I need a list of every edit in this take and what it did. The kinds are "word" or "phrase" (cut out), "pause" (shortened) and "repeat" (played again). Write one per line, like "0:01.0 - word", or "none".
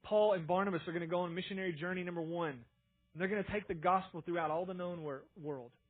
none